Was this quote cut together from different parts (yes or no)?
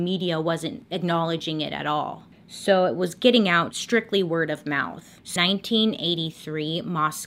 yes